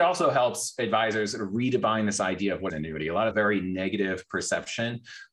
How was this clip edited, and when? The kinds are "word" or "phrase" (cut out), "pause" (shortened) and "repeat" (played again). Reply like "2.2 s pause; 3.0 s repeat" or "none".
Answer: 2.7 s word; 3.3 s phrase

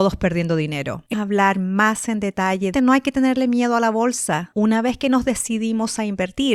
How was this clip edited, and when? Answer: 1.1 s phrase; 2.7 s phrase

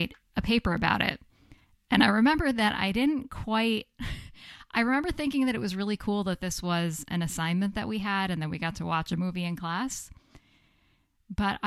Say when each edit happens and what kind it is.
none

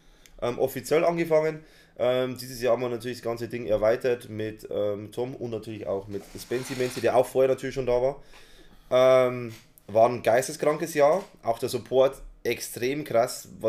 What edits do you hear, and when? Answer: none

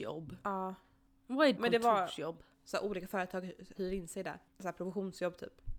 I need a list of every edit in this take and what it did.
1.6 s phrase; 2.5 s pause; 3.7 s phrase; 4.5 s pause

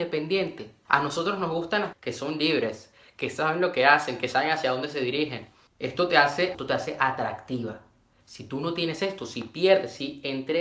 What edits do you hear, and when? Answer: 1.9 s word; 6.5 s word

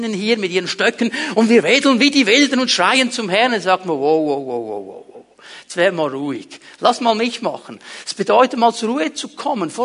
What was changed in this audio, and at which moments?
none

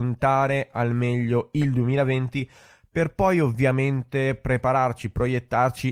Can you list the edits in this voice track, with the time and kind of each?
none

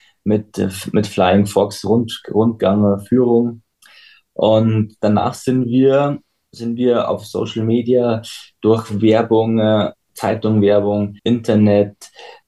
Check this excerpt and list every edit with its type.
11.2 s pause

